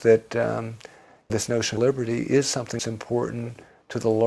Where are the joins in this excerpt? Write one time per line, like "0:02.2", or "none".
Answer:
0:01.3
0:01.8
0:02.8